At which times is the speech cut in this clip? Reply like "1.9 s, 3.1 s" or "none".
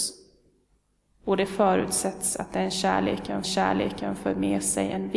3.4 s